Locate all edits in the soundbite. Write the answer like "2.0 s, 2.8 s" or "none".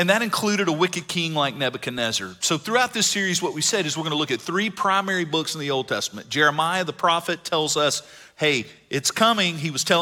none